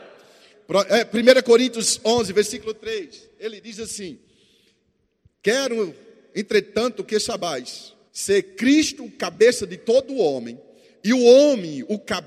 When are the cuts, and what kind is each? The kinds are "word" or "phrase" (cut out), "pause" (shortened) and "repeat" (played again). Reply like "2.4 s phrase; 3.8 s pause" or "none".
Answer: 8.1 s pause